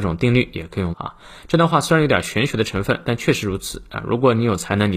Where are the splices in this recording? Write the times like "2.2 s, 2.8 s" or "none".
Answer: 0.9 s